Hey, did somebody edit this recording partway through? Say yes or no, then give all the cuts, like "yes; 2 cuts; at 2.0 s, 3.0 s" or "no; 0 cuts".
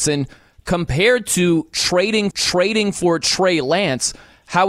yes; 1 cut; at 2.3 s